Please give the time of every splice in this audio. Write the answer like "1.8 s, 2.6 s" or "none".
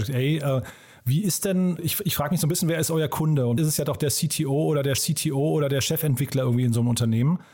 1.8 s, 3.6 s, 5.0 s

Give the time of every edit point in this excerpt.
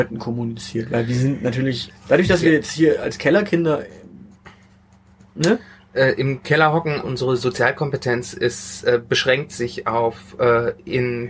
1.9 s, 7.0 s

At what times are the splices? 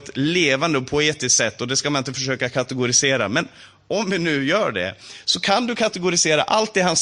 none

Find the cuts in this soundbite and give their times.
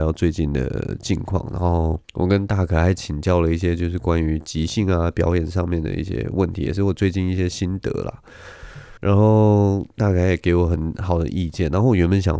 2.0 s, 9.0 s

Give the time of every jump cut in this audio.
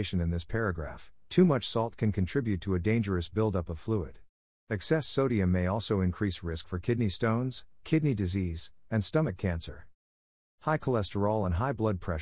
none

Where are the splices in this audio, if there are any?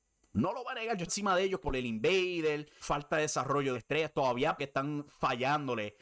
1.1 s, 1.6 s, 2.8 s, 3.7 s, 4.6 s

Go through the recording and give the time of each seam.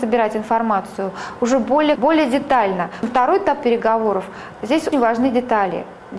2.0 s, 4.9 s

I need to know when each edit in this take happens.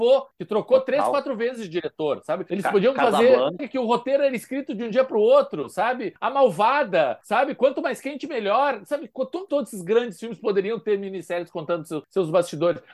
3.6 s, 9.5 s

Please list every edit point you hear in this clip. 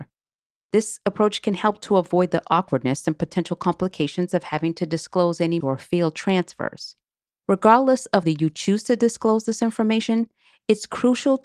5.6 s, 7.3 s, 8.2 s

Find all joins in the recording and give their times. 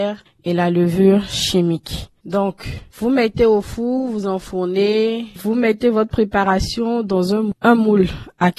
2.2 s

